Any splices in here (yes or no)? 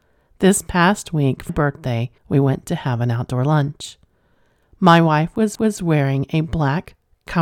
yes